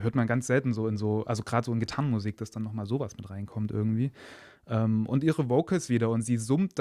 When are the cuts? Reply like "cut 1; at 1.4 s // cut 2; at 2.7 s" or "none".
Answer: none